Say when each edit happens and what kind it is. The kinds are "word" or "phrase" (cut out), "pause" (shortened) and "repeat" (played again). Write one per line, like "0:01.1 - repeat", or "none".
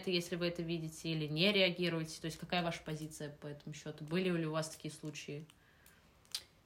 none